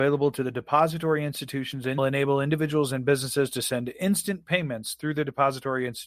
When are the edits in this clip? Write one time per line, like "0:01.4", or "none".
0:02.0

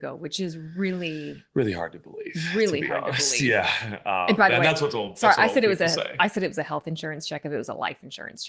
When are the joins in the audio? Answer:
none

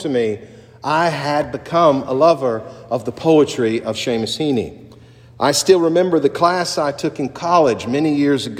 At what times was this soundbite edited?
none

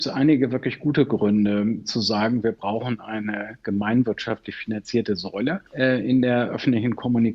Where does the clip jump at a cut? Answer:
0:05.7

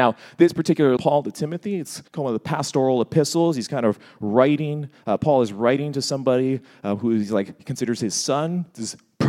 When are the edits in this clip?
0:01.0
0:02.1

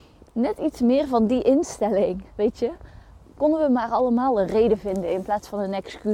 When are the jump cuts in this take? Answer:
none

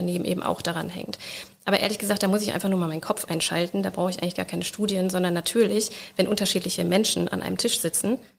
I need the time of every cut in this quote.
none

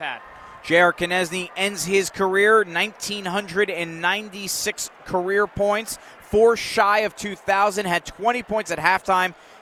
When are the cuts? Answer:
none

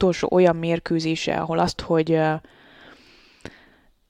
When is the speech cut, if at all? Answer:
0:01.8

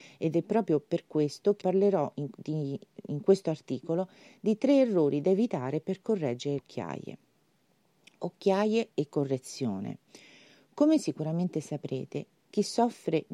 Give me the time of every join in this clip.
0:01.6
0:06.6

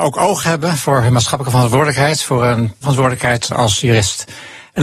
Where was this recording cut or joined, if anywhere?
0:02.8

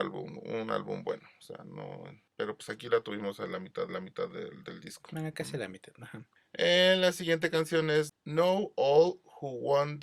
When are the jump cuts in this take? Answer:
0:03.9

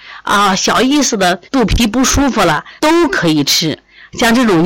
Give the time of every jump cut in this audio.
0:01.5
0:02.8

